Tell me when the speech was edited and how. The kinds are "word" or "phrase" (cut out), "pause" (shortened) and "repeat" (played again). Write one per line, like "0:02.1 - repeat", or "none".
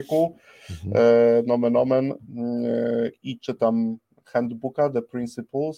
none